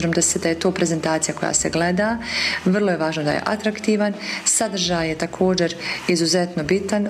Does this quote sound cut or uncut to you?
uncut